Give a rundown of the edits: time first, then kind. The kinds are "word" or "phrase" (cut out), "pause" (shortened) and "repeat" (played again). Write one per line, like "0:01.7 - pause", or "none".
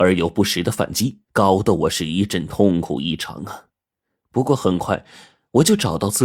0:01.2 - pause

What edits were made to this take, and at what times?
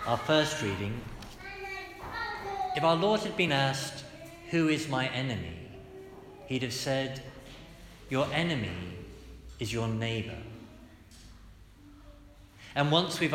none

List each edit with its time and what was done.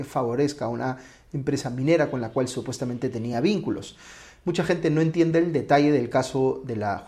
none

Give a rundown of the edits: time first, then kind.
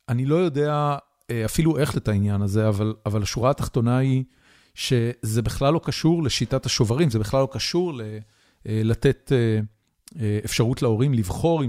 0:01.9 - word

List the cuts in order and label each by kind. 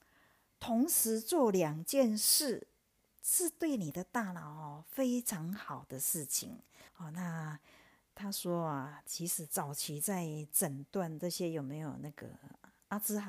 0:06.9 - pause

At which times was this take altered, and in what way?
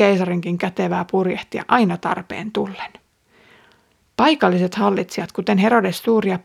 none

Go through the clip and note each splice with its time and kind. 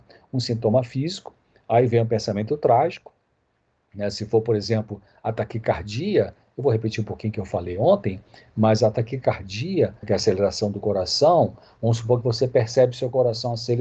0:10.0 - word

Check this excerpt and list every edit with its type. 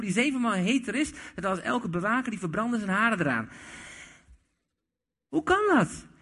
none

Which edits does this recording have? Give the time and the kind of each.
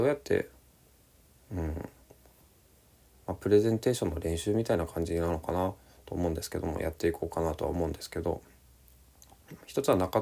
none

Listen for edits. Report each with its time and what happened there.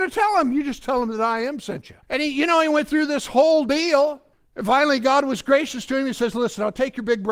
0:02.0 - pause
0:04.3 - pause

